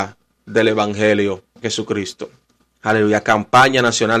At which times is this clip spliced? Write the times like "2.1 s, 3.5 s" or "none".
1.6 s, 2.4 s